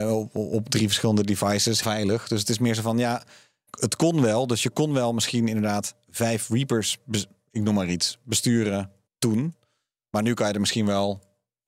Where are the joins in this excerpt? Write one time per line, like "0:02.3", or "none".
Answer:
0:01.8
0:03.7
0:09.1

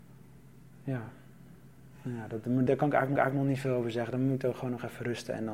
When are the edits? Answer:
0:02.7
0:03.2

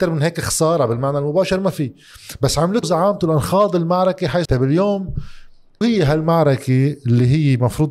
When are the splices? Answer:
0:02.8
0:04.5
0:05.8

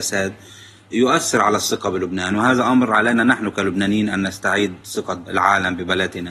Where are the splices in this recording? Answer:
none

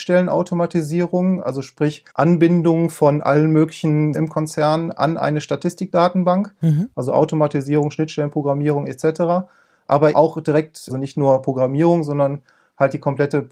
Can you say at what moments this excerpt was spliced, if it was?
0:02.1
0:04.1
0:10.1
0:10.9

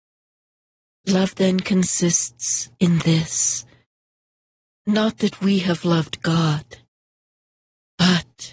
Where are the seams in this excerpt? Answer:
none

